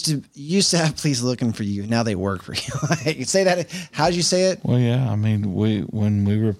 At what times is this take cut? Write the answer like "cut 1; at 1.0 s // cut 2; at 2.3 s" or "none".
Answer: none

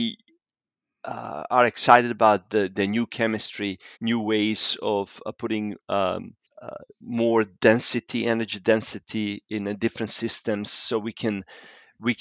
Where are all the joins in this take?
cut 1; at 3.9 s // cut 2; at 6.4 s

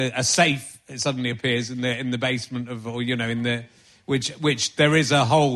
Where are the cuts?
none

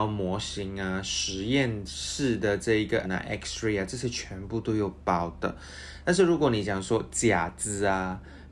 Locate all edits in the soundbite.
cut 1; at 3.0 s

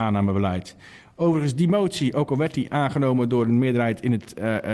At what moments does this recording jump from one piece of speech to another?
none

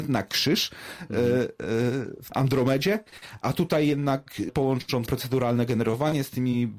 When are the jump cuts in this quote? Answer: cut 1; at 2.3 s // cut 2; at 4.5 s // cut 3; at 5.1 s

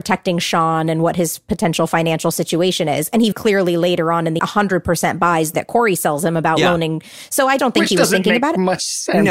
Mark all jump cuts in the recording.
cut 1; at 3.3 s // cut 2; at 4.4 s // cut 3; at 5.5 s // cut 4; at 7.6 s

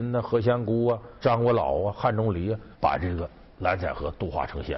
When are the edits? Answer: cut 1; at 1.2 s // cut 2; at 2.7 s

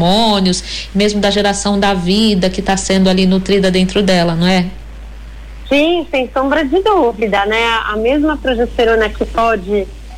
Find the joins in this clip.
none

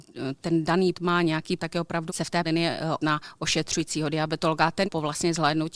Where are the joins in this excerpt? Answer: cut 1; at 0.9 s // cut 2; at 1.6 s // cut 3; at 2.1 s // cut 4; at 2.4 s // cut 5; at 3.0 s // cut 6; at 4.8 s

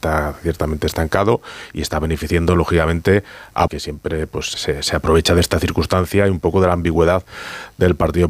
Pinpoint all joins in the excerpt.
cut 1; at 3.7 s // cut 2; at 4.5 s

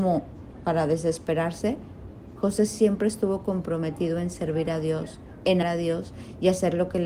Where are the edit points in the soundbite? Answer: cut 1; at 5.6 s

